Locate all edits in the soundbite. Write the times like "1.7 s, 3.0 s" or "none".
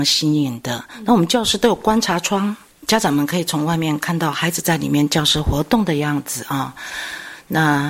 none